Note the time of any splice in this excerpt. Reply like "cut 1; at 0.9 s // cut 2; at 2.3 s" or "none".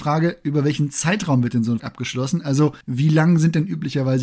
cut 1; at 1.8 s // cut 2; at 2.8 s